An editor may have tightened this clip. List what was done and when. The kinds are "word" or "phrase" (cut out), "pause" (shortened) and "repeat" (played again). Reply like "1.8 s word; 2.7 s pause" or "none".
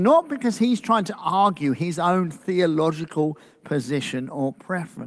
none